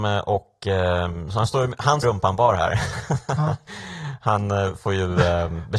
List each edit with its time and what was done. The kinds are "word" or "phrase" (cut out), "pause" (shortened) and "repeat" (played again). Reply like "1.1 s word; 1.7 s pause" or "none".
2.0 s phrase